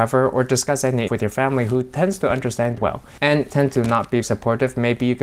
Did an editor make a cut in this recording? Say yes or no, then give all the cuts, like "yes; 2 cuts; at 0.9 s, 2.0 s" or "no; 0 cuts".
yes; 4 cuts; at 1.1 s, 2.8 s, 3.5 s, 4.2 s